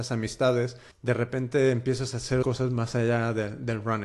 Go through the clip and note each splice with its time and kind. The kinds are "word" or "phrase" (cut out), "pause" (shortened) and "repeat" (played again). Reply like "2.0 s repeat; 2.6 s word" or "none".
0.9 s word; 2.4 s word